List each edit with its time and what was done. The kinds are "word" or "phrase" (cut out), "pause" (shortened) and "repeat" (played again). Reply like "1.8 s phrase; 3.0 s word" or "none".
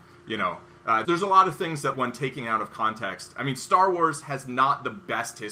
1.0 s word; 1.9 s word